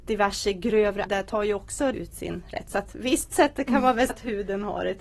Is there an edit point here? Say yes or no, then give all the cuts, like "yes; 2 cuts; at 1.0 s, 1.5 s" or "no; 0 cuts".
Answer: yes; 4 cuts; at 1.1 s, 1.9 s, 3.3 s, 4.1 s